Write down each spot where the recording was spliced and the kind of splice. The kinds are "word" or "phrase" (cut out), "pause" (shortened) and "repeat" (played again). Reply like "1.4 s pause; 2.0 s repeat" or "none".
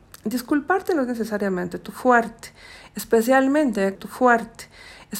3.9 s repeat